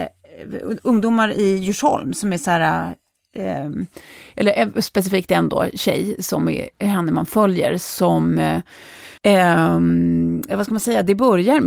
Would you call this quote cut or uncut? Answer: cut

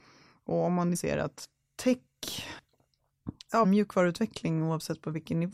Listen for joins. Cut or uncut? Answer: cut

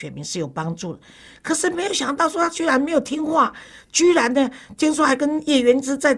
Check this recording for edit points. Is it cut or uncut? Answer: uncut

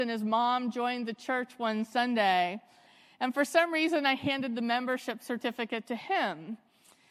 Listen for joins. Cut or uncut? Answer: uncut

